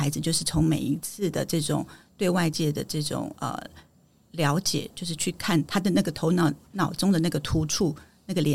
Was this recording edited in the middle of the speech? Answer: no; 0 cuts

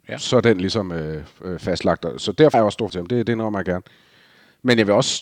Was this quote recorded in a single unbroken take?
no; 2 cuts; at 2.5 s, 2.9 s

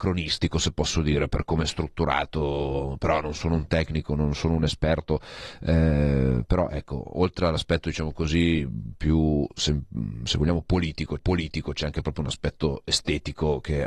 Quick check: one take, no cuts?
no; 1 cut; at 11.2 s

